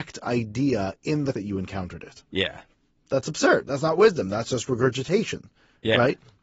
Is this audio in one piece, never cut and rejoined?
no; 1 cut; at 1.3 s

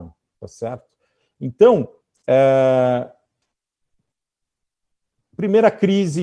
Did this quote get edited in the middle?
no; 0 cuts

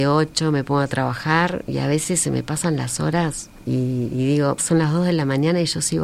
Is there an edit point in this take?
yes; 2 cuts; at 3.6 s, 4.6 s

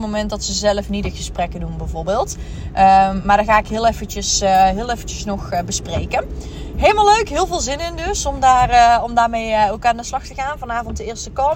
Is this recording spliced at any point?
no; 0 cuts

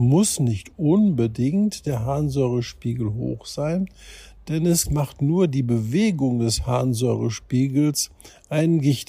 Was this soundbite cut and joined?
no; 0 cuts

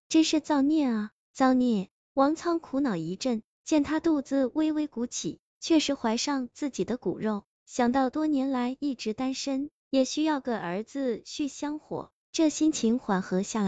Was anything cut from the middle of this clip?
no; 0 cuts

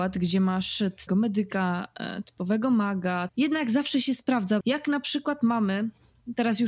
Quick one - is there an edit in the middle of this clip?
yes; 3 cuts; at 1.1 s, 3.3 s, 4.6 s

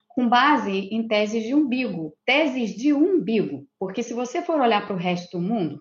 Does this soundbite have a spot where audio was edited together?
yes; 1 cut; at 2.2 s

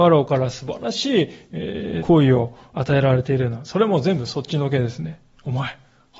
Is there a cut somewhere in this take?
yes; 1 cut; at 2.0 s

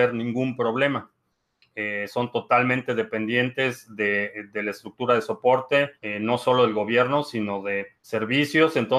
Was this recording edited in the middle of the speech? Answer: yes; 2 cuts; at 6.0 s, 8.0 s

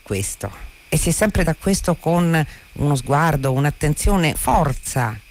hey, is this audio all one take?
no; 2 cuts; at 1.4 s, 4.3 s

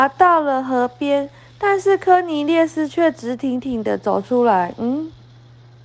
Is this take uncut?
yes; 0 cuts

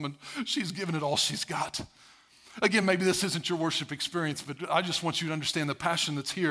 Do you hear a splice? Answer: no; 0 cuts

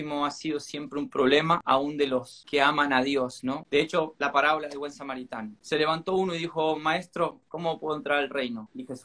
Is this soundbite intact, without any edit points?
no; 1 cut; at 7.5 s

